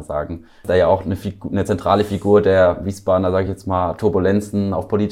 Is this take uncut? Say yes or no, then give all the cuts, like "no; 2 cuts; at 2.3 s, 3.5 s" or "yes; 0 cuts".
yes; 0 cuts